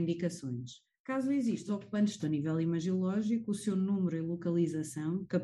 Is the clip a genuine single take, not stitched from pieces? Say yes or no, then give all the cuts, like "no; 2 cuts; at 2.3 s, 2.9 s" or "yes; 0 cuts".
no; 2 cuts; at 1.7 s, 2.2 s